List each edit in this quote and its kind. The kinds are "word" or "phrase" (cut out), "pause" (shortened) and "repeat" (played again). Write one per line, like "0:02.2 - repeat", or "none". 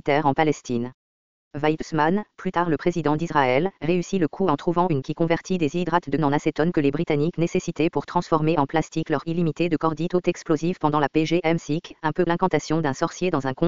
0:02.8 - word
0:05.0 - word
0:06.2 - word
0:09.2 - word
0:12.3 - word